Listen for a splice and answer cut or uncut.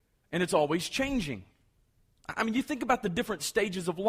uncut